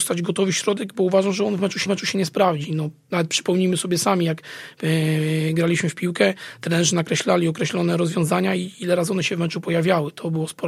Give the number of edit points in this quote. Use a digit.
1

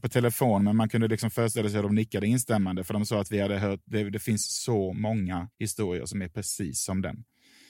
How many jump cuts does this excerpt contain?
1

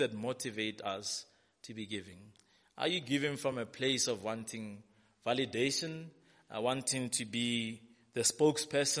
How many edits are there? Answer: 0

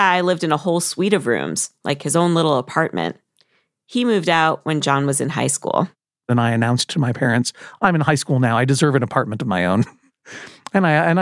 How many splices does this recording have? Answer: 0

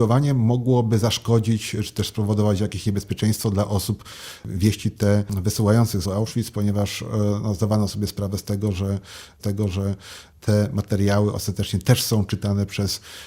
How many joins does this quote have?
2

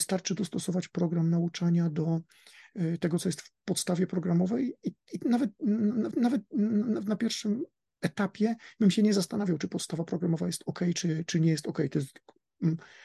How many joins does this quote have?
1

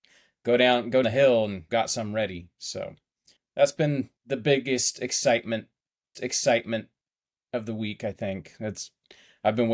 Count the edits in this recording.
5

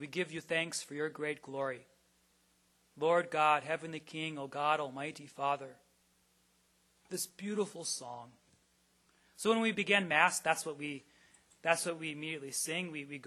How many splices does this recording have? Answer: 0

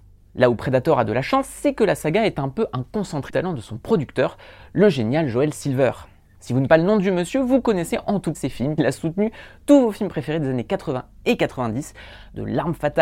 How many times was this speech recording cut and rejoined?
4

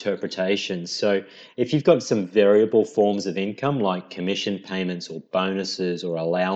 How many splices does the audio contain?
0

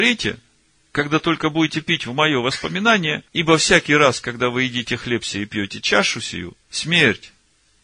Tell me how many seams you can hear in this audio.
2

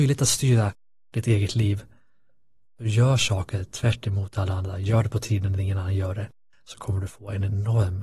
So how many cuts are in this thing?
0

